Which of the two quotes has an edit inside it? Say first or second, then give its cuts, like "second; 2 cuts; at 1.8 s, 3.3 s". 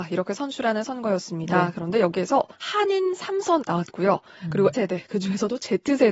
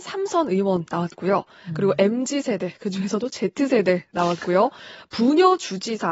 first; 3 cuts; at 2.5 s, 3.6 s, 4.7 s